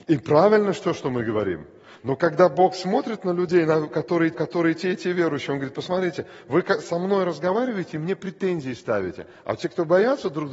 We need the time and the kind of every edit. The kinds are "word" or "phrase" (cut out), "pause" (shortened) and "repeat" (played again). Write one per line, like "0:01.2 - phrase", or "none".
0:04.3 - repeat